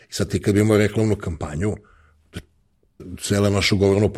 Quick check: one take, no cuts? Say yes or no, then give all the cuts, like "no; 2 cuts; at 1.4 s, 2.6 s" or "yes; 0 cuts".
no; 1 cut; at 3.0 s